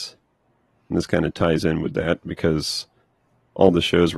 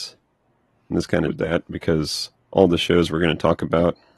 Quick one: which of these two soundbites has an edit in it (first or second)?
second